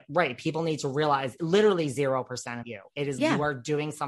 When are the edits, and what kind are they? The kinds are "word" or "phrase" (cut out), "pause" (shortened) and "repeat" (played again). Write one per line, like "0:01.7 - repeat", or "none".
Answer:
0:01.4 - phrase
0:02.6 - word
0:03.2 - word